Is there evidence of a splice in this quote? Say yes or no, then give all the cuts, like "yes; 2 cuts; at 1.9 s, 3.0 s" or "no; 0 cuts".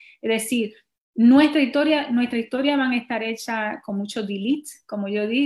no; 0 cuts